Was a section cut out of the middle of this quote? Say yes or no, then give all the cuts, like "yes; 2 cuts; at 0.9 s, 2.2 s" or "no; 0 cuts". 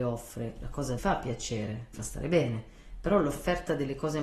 yes; 2 cuts; at 1.0 s, 1.9 s